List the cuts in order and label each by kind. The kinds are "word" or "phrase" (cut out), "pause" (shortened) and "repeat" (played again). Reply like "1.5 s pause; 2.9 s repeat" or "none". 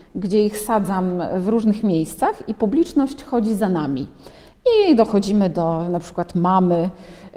none

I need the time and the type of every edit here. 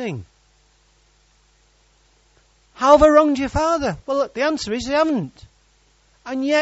none

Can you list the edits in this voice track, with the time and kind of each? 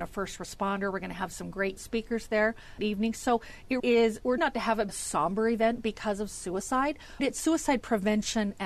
1.8 s word; 2.8 s word; 3.8 s word; 4.4 s word; 4.9 s word; 7.2 s word

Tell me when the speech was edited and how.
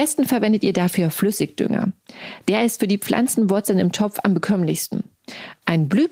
none

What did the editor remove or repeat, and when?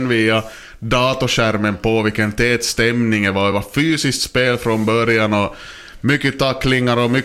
none

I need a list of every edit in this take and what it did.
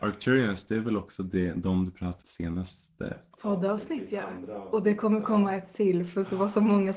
2.2 s phrase

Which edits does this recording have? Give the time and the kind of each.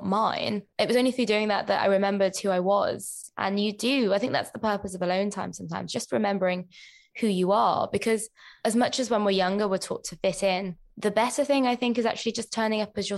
none

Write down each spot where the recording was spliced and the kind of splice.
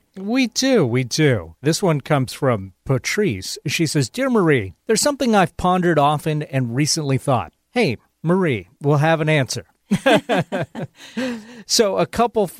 1.6 s pause; 4.8 s pause; 7.6 s pause

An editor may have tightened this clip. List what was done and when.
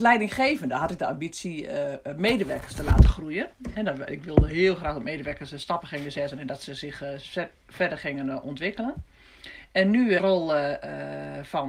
10.2 s phrase

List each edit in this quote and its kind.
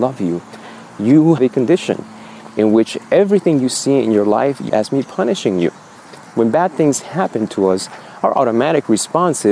1.4 s word; 4.7 s word

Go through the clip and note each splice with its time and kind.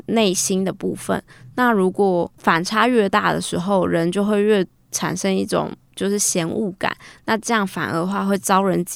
2.4 s pause

